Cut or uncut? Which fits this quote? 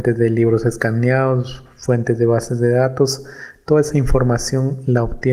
uncut